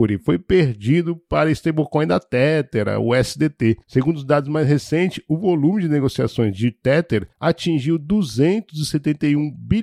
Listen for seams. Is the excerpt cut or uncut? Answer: cut